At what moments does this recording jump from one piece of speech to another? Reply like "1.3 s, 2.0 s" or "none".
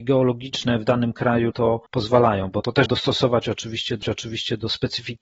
1.5 s, 1.9 s, 2.9 s, 4.0 s